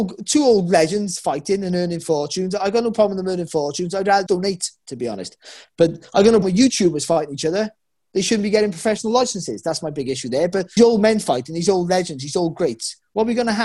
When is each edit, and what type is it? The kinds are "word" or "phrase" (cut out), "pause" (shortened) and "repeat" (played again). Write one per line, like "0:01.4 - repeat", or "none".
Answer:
0:04.3 - word
0:06.4 - word
0:10.8 - word